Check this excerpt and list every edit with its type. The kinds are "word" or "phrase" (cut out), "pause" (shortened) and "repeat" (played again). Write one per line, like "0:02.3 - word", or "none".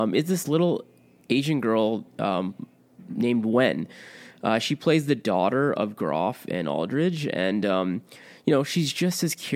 none